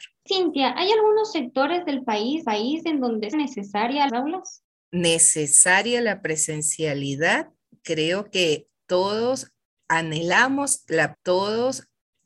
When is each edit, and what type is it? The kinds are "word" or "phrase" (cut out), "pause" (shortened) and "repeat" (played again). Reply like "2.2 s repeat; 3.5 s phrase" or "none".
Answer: 2.4 s repeat; 3.3 s word; 4.1 s phrase; 11.1 s repeat